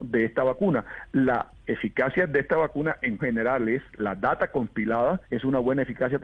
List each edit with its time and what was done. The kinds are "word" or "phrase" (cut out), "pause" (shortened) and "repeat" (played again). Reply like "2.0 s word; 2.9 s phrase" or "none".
1.6 s word; 3.2 s word; 3.9 s pause; 5.2 s pause